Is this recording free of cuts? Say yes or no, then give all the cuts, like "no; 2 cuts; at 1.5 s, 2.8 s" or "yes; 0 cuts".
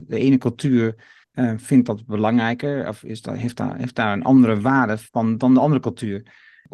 no; 2 cuts; at 1.2 s, 5.1 s